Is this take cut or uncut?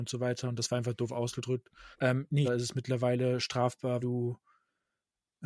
cut